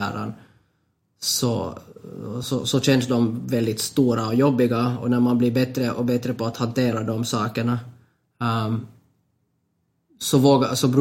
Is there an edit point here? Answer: no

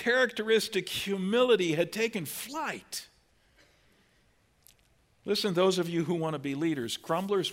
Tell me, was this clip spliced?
no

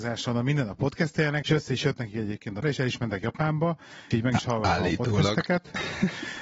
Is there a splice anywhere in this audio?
yes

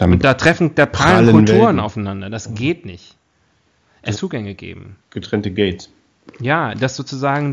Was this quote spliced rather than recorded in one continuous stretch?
yes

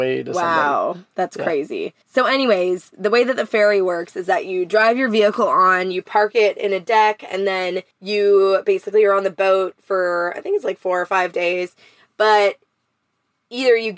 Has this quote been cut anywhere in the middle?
yes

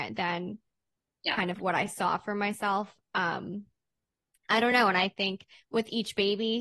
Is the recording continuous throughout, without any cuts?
yes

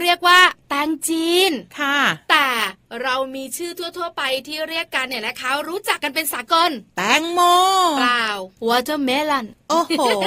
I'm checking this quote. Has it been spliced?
yes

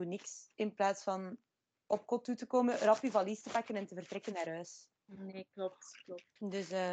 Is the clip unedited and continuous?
no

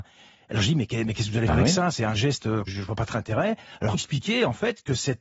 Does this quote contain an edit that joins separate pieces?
yes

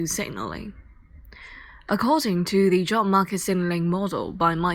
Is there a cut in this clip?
no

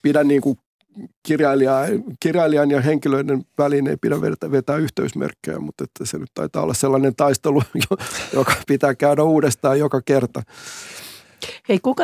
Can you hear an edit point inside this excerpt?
no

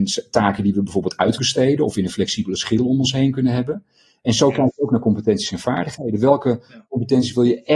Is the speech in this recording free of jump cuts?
no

